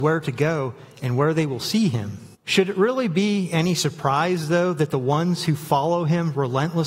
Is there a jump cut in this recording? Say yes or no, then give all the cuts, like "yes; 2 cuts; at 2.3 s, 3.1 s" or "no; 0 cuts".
yes; 1 cut; at 2.3 s